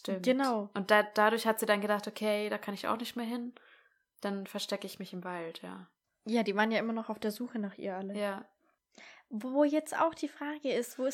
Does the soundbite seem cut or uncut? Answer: uncut